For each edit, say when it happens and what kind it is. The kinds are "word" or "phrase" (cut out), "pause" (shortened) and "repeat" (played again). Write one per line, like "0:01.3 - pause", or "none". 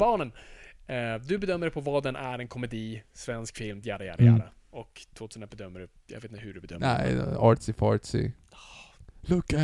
none

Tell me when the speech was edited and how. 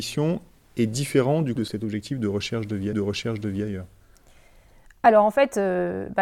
0:01.6 - word
0:02.9 - repeat

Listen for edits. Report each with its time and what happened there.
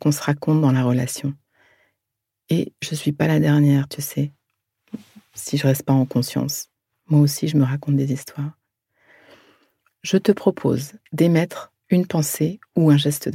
none

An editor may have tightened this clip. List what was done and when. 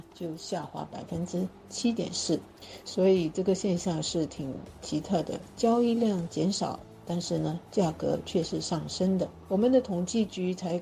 0:07.7 - pause

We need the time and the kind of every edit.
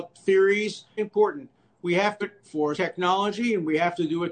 0:01.0 - word
0:02.2 - word
0:02.7 - word

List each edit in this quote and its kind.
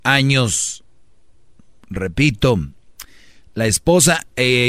none

